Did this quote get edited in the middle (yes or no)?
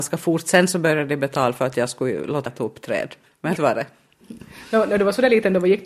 yes